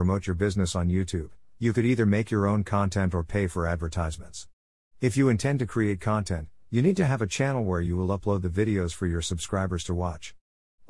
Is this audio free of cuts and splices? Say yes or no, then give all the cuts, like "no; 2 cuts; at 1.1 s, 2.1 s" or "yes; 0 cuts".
yes; 0 cuts